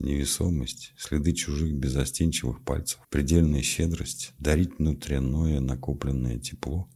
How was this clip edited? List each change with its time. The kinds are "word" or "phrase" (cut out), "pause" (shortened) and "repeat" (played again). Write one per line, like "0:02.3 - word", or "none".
0:03.0 - pause